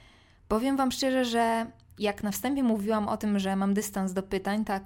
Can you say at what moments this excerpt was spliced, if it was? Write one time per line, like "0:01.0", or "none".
none